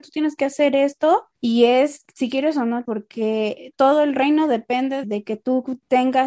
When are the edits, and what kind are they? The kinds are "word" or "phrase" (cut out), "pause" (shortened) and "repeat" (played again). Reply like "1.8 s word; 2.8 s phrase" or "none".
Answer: 1.4 s pause; 2.8 s word; 3.7 s word; 5.0 s word

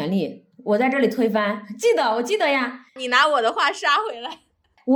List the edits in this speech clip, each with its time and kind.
2.9 s pause

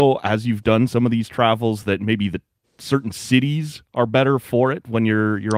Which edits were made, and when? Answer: none

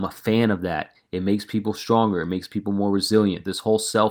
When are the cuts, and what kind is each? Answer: none

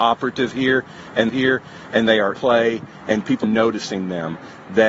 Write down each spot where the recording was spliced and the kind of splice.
1.3 s repeat; 2.3 s word; 3.4 s word

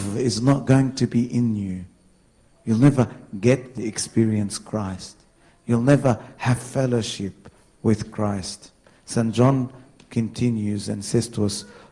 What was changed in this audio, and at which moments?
none

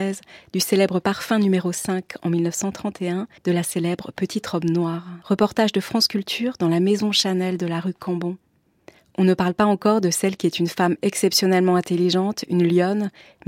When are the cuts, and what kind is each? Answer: 3.4 s pause; 5.2 s pause

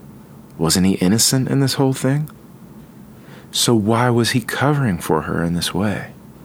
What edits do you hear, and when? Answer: none

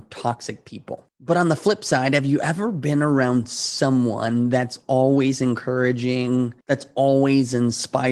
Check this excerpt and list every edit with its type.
1.1 s pause; 6.6 s pause

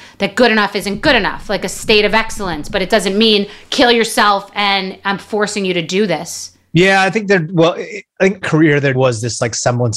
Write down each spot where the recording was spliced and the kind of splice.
8.4 s phrase; 8.9 s word

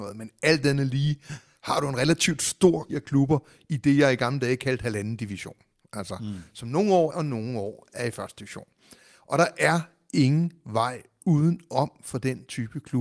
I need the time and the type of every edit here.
2.9 s word; 7.1 s phrase

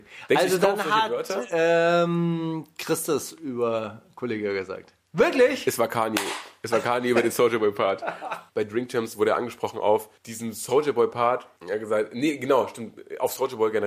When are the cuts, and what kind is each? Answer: none

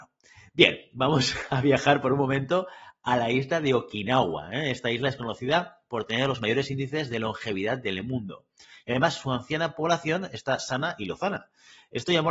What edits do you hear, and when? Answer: none

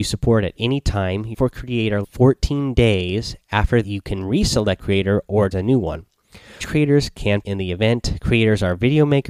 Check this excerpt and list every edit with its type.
1.3 s word; 2.0 s word; 3.8 s word; 4.8 s word; 5.5 s word; 6.6 s word; 7.4 s word

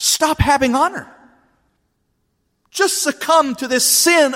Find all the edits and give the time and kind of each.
none

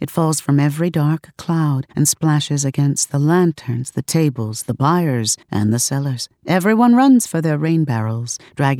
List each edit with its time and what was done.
1.9 s pause; 5.4 s pause; 6.4 s pause

